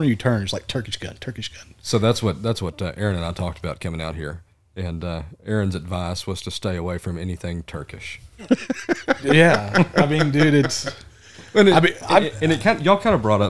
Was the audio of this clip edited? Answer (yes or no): no